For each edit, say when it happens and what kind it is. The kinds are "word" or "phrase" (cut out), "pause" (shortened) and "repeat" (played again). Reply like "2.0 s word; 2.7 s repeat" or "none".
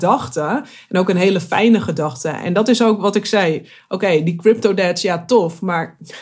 none